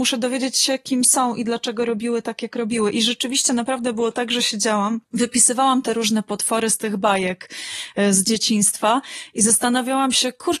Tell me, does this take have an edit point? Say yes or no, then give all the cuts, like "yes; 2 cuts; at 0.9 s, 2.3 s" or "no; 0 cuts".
yes; 1 cut; at 5.1 s